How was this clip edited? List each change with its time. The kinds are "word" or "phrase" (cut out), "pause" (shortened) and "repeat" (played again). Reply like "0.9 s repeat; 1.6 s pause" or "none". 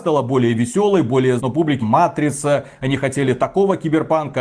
1.4 s word; 1.8 s phrase